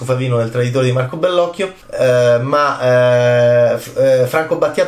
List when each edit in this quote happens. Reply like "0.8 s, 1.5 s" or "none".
1.8 s